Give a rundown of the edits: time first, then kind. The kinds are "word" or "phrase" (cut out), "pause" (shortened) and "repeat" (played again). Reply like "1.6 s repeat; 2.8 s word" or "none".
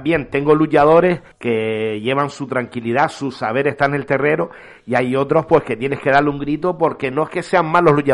1.3 s pause